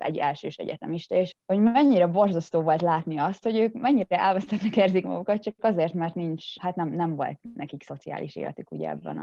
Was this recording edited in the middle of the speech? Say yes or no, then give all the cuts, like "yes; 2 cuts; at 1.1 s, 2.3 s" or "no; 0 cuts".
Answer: yes; 2 cuts; at 1.3 s, 6.6 s